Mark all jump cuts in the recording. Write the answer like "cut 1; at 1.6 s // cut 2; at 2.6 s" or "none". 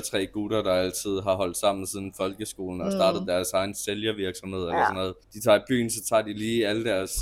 cut 1; at 5.2 s

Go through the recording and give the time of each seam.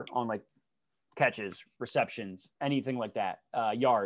cut 1; at 2.5 s

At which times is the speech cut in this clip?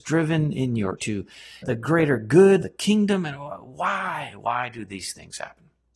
cut 1; at 1.0 s // cut 2; at 1.6 s // cut 3; at 2.6 s

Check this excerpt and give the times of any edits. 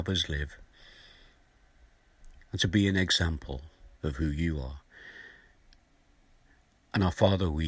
cut 1; at 2.4 s // cut 2; at 4.0 s

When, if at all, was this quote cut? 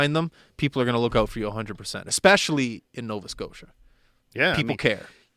none

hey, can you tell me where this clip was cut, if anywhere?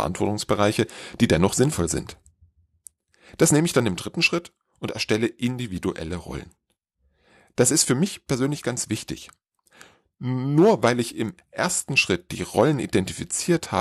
none

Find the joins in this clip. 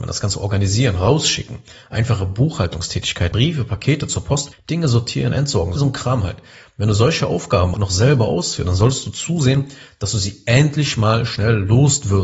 cut 1; at 3.3 s // cut 2; at 4.5 s // cut 3; at 5.8 s // cut 4; at 7.7 s

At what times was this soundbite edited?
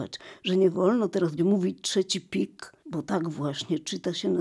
cut 1; at 1.4 s // cut 2; at 2.8 s

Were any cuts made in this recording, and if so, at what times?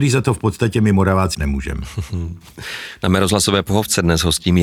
cut 1; at 1.3 s

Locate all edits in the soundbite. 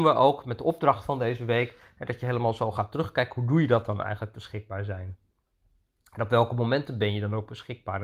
none

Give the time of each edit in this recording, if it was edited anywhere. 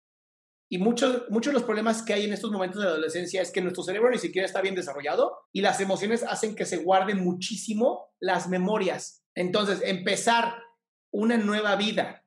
cut 1; at 5.4 s // cut 2; at 9.3 s

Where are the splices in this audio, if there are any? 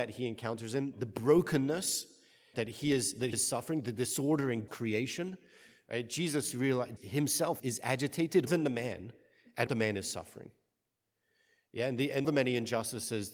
cut 1; at 2.5 s // cut 2; at 3.3 s // cut 3; at 4.7 s // cut 4; at 7.0 s // cut 5; at 7.6 s // cut 6; at 8.5 s // cut 7; at 9.7 s // cut 8; at 12.2 s

